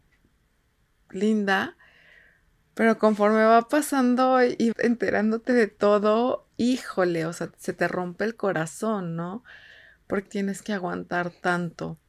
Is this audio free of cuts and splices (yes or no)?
no